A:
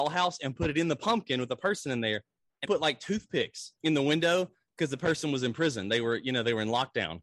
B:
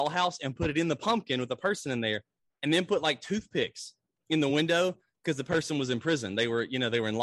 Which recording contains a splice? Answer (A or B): A